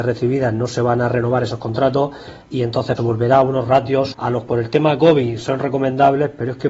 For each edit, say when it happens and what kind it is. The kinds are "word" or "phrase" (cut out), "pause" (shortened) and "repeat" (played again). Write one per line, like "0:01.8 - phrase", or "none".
0:03.0 - word
0:04.1 - word
0:04.5 - word